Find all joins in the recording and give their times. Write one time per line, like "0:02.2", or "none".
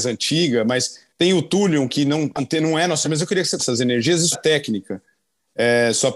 0:01.1
0:02.4
0:03.0
0:03.6
0:04.3

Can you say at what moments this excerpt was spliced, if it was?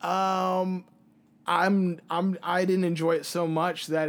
none

